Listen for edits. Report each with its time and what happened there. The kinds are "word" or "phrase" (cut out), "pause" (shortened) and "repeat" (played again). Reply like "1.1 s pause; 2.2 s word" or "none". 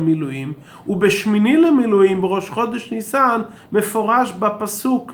none